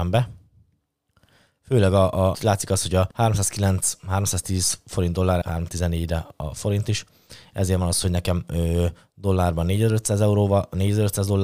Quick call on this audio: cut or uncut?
cut